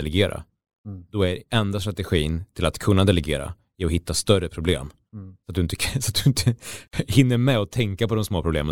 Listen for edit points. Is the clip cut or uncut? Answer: uncut